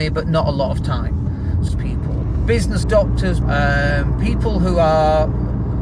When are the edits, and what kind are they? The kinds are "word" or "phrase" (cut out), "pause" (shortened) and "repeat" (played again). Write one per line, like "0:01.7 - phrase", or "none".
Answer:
0:01.7 - phrase
0:02.8 - word
0:03.4 - word